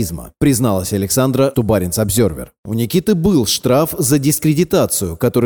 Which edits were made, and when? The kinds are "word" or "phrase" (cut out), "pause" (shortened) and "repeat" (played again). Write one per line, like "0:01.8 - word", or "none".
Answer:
0:01.5 - word